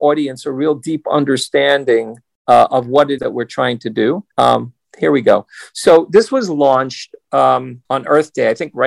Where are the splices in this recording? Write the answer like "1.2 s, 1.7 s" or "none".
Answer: 3.2 s, 4.3 s, 7.9 s